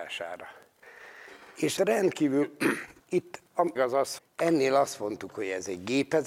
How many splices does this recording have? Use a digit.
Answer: 4